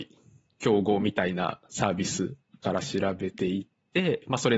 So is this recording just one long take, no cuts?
no; 1 cut; at 2.5 s

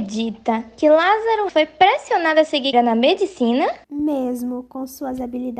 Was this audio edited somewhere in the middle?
yes; 3 cuts; at 1.5 s, 2.7 s, 3.8 s

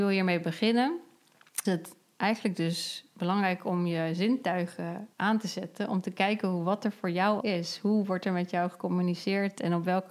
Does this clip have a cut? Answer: yes; 3 cuts; at 1.6 s, 5.1 s, 7.4 s

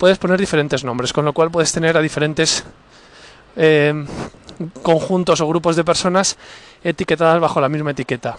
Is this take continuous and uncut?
yes; 0 cuts

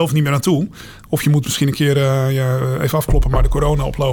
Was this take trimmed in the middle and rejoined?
no; 0 cuts

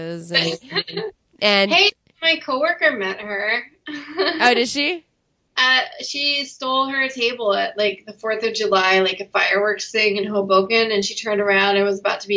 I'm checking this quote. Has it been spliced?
no; 0 cuts

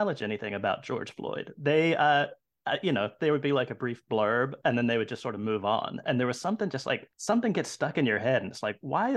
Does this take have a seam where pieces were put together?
yes; 1 cut; at 7.1 s

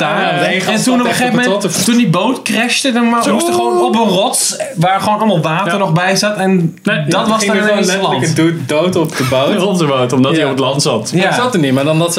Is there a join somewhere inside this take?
no; 0 cuts

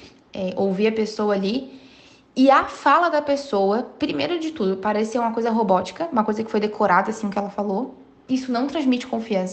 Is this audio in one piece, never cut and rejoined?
yes; 0 cuts

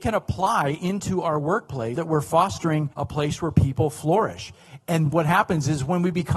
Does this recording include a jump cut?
yes; 3 cuts; at 2.0 s, 2.9 s, 5.1 s

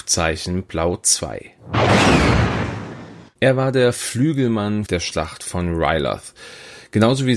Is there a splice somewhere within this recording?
yes; 2 cuts; at 3.3 s, 4.9 s

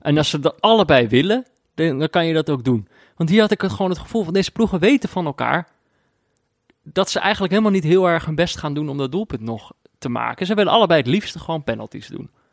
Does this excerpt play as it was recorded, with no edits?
yes; 0 cuts

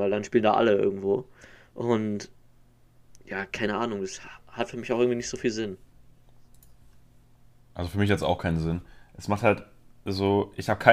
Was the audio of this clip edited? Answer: no; 0 cuts

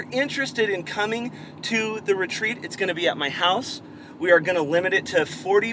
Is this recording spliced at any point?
no; 0 cuts

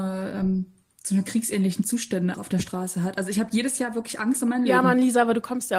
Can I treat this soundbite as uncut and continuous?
no; 1 cut; at 2.3 s

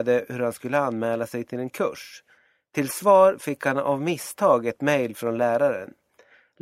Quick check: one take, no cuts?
yes; 0 cuts

